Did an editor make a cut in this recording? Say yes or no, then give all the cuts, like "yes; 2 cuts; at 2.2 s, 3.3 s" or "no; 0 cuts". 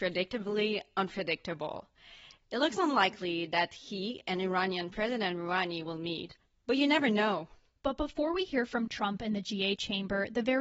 no; 0 cuts